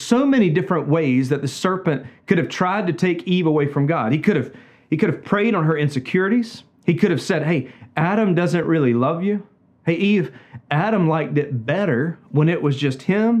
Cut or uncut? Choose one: uncut